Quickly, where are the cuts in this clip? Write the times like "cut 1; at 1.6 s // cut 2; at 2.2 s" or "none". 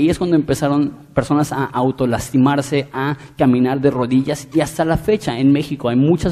none